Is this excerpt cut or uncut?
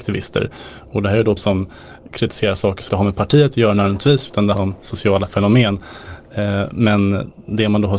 cut